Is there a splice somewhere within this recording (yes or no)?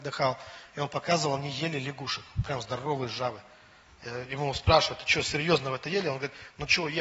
no